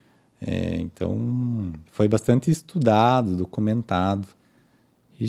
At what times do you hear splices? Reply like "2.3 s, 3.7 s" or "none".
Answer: 1.9 s